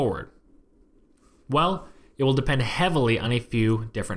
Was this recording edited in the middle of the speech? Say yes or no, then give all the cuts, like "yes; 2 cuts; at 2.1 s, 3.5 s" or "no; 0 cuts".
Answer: no; 0 cuts